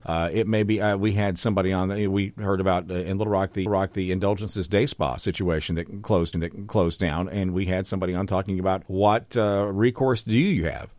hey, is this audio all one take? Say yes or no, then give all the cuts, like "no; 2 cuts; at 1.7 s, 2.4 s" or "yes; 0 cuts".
no; 2 cuts; at 3.7 s, 6.3 s